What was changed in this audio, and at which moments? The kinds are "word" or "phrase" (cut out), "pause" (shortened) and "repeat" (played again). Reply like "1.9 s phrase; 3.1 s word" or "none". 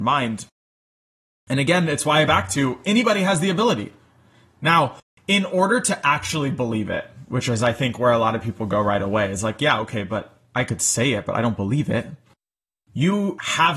2.3 s phrase